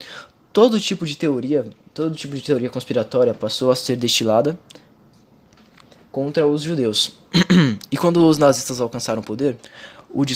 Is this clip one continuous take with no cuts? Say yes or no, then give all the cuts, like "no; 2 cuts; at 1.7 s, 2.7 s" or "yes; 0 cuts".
yes; 0 cuts